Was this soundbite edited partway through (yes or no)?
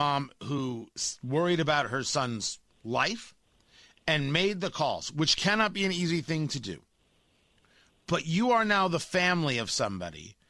no